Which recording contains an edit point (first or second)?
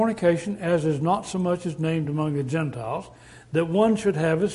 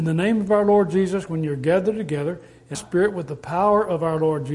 second